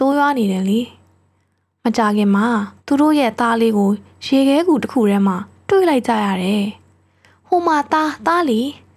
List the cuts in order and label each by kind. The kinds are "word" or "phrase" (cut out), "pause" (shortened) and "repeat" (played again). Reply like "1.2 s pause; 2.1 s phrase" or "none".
2.8 s pause